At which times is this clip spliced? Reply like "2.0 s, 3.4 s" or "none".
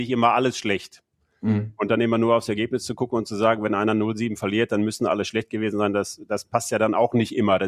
none